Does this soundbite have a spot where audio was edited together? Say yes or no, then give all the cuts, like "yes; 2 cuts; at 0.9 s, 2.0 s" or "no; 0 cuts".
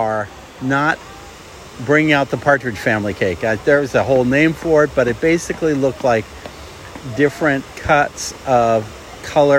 no; 0 cuts